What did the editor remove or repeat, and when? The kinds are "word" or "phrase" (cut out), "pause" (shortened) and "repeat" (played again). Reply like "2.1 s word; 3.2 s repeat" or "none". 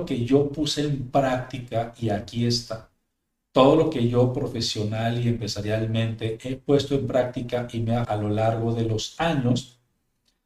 8.0 s word